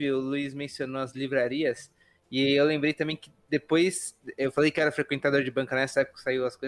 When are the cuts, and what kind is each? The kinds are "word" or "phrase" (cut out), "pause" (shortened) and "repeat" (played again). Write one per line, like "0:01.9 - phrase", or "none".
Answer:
none